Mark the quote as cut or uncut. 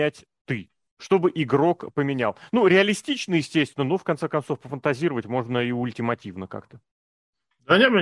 uncut